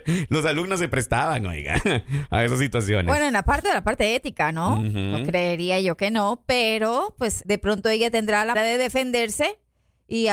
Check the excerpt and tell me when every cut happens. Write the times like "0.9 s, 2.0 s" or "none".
3.6 s, 7.4 s, 8.5 s

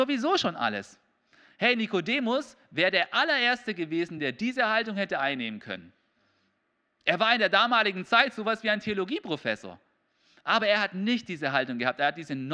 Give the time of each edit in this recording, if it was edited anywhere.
none

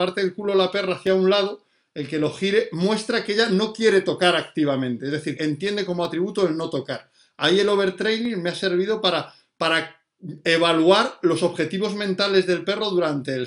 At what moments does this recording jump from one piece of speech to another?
5.4 s

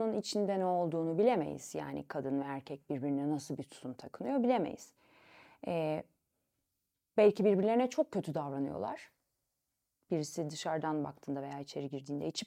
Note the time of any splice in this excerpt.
none

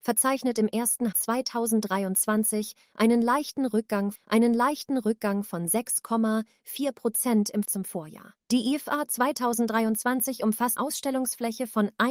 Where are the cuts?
1.1 s, 4.1 s, 7.6 s, 8.4 s, 10.8 s

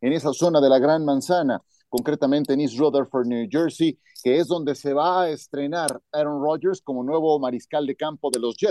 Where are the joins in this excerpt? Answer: none

